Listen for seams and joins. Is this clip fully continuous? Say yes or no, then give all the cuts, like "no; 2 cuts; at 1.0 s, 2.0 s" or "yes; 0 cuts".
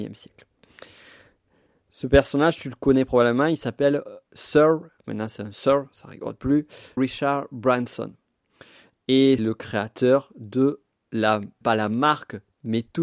no; 4 cuts; at 5.0 s, 7.0 s, 9.4 s, 11.6 s